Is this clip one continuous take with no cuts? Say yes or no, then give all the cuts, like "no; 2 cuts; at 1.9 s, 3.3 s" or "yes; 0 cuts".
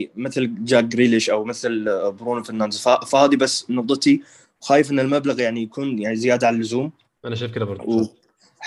yes; 0 cuts